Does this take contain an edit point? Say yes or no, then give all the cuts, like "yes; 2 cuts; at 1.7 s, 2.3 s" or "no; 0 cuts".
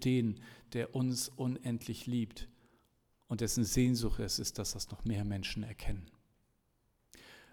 no; 0 cuts